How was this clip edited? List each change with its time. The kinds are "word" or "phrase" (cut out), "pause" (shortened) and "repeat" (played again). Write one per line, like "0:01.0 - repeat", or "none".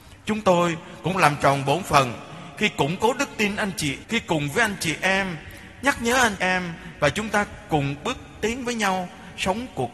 0:01.1 - word
0:04.0 - word
0:06.4 - word